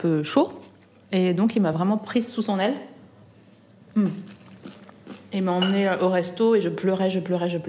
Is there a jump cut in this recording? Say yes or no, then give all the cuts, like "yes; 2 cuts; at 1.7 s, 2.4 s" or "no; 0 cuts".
no; 0 cuts